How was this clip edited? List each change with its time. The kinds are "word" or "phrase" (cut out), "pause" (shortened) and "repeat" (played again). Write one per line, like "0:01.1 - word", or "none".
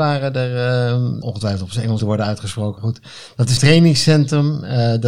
0:01.2 - word
0:02.0 - word
0:02.8 - word
0:03.6 - word